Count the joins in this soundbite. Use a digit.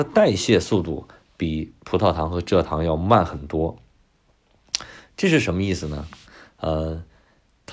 0